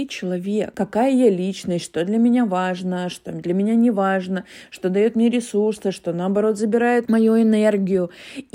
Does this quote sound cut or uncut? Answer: uncut